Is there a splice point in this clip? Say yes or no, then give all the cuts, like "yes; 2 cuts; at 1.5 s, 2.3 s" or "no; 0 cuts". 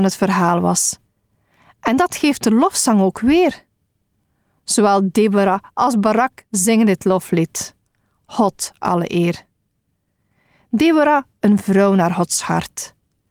no; 0 cuts